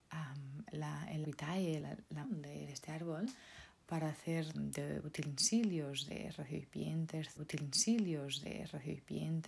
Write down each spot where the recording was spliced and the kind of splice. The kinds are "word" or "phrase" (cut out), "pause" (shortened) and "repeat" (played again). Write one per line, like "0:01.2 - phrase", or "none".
0:01.2 - word
0:01.8 - word
0:02.2 - word
0:02.7 - word
0:04.5 - phrase
0:07.4 - repeat